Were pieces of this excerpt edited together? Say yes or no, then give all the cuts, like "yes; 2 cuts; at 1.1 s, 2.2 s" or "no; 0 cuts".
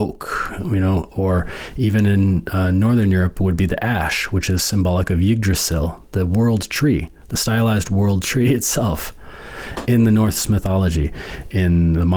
no; 0 cuts